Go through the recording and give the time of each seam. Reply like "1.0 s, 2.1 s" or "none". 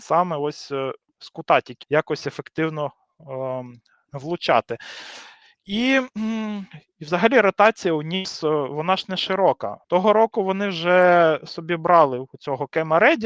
1.8 s, 9.8 s